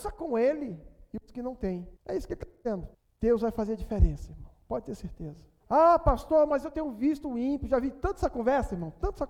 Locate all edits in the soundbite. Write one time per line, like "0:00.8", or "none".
0:02.0
0:02.9
0:05.6